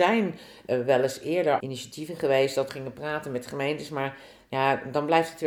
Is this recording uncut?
no; 2 cuts; at 1.6 s, 2.7 s

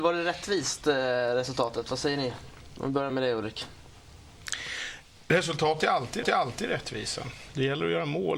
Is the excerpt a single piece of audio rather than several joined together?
no; 2 cuts; at 3.1 s, 6.2 s

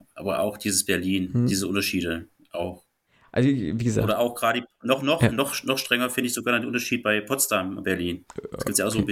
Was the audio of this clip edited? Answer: no; 0 cuts

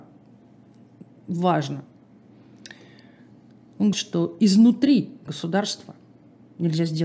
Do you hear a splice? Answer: yes; 2 cuts; at 3.9 s, 5.3 s

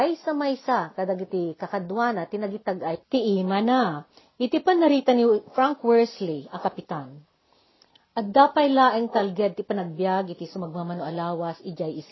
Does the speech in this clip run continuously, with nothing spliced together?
yes; 0 cuts

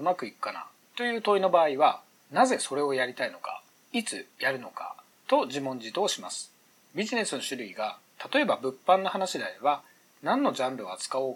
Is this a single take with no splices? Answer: yes; 0 cuts

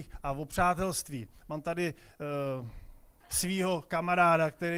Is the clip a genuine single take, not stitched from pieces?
no; 1 cut; at 3.2 s

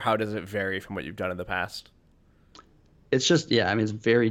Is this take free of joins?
yes; 0 cuts

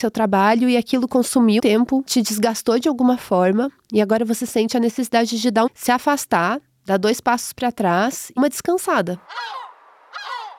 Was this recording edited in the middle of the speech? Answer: yes; 3 cuts; at 1.6 s, 5.7 s, 8.4 s

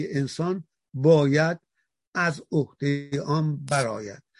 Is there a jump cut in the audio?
no; 0 cuts

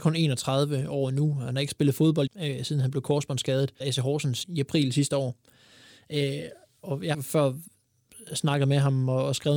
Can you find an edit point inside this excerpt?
yes; 5 cuts; at 2.3 s, 3.8 s, 4.4 s, 6.8 s, 7.1 s

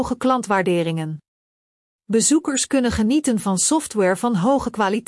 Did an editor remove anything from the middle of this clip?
no; 0 cuts

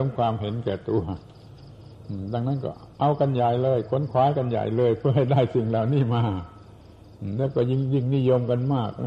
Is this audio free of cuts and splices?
no; 1 cut; at 2.9 s

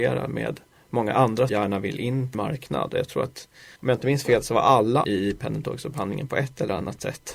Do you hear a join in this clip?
yes; 4 cuts; at 1.5 s, 2.3 s, 3.8 s, 5.0 s

